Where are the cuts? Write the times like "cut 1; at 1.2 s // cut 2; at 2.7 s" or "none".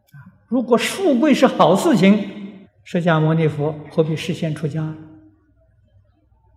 cut 1; at 2.6 s